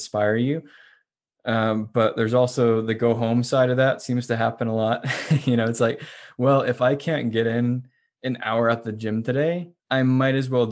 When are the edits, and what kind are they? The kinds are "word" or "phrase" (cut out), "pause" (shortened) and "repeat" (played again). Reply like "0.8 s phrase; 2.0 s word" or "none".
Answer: 9.8 s pause